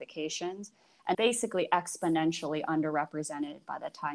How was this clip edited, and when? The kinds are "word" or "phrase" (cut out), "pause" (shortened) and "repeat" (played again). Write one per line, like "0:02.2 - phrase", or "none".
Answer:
0:01.1 - word